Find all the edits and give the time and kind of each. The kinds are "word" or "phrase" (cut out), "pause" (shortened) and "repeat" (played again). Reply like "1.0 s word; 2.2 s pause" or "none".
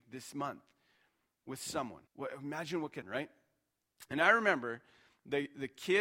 2.1 s pause; 3.0 s word